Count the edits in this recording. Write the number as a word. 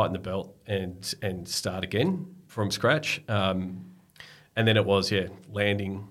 one